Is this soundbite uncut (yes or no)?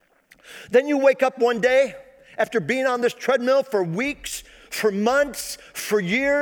yes